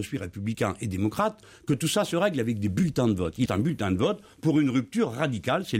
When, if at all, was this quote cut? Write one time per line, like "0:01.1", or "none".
0:03.5